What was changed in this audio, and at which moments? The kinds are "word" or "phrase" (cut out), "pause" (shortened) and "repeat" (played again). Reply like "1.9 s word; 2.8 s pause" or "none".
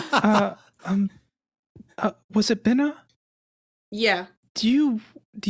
none